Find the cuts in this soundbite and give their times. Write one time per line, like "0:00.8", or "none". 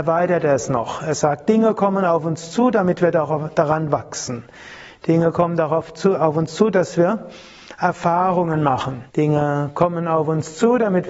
0:09.1